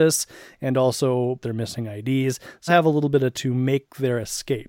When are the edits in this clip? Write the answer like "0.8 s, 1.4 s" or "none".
1.4 s, 2.7 s, 3.3 s